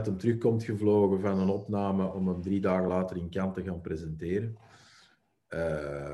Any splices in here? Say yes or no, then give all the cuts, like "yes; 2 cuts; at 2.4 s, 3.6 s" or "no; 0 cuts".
no; 0 cuts